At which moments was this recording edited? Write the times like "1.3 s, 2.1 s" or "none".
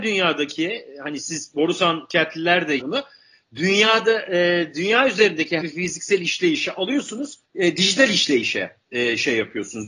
2.8 s, 5.6 s, 7.4 s, 8.8 s

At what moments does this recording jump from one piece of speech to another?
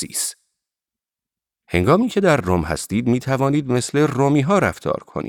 none

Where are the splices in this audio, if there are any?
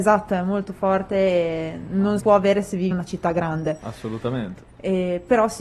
2.2 s, 2.9 s

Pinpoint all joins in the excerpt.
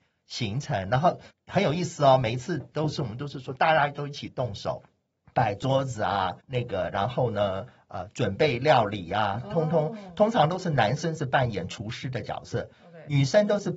1.3 s, 6.4 s

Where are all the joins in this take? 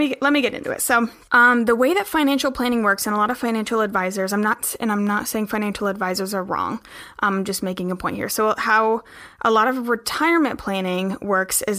none

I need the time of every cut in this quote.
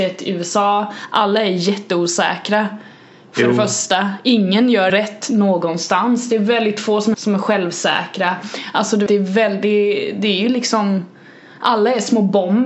4.9 s, 7.1 s, 9.1 s

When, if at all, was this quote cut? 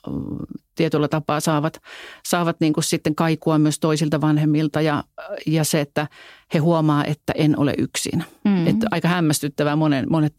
none

